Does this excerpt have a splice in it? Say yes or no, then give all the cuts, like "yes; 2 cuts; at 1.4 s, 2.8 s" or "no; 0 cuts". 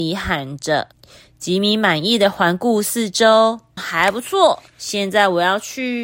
yes; 3 cuts; at 0.9 s, 3.8 s, 4.7 s